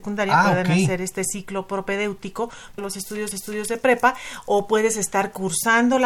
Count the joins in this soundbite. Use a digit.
2